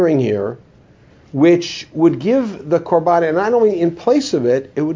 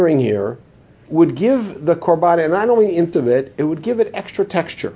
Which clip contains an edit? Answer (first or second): second